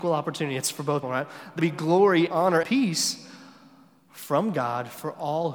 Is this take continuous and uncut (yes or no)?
no